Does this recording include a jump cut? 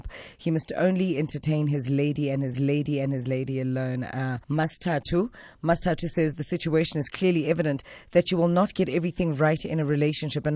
yes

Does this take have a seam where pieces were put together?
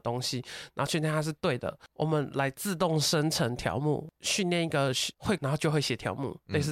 yes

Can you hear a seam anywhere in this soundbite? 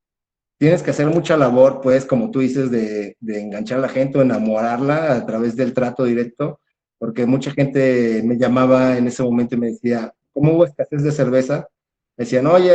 no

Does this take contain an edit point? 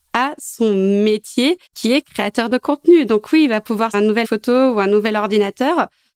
yes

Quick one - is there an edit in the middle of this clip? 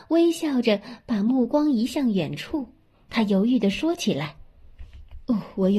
no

